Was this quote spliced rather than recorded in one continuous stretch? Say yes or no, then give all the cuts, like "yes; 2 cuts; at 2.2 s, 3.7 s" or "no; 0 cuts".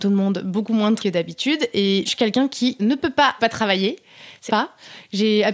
yes; 5 cuts; at 1.0 s, 2.1 s, 2.8 s, 3.4 s, 4.5 s